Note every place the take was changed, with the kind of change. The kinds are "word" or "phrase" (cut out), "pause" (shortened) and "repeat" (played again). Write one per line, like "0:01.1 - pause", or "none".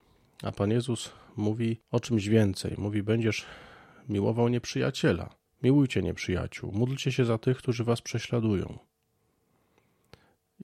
0:01.8 - pause
0:05.5 - pause